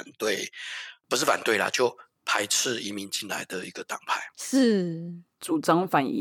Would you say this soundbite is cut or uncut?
uncut